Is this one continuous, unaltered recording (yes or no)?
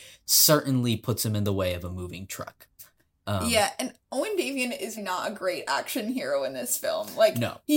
no